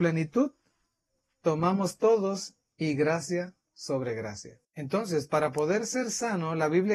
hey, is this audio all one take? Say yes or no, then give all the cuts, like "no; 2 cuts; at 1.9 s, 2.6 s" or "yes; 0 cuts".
no; 1 cut; at 4.6 s